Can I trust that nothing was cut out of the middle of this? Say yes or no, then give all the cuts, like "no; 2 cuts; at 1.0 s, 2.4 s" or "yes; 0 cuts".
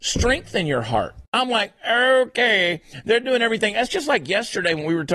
no; 1 cut; at 1.3 s